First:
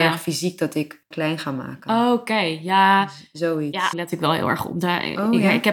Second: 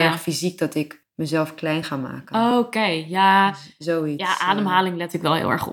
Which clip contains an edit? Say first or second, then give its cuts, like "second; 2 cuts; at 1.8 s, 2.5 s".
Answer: first; 2 cuts; at 1.1 s, 3.9 s